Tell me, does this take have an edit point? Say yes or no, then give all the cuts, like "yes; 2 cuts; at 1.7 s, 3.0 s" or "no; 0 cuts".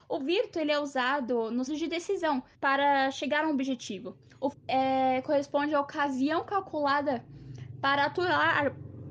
yes; 3 cuts; at 1.7 s, 2.5 s, 4.5 s